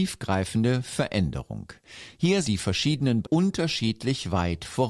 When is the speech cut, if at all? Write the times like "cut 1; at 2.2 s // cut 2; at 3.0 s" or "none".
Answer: cut 1; at 2.4 s // cut 2; at 3.2 s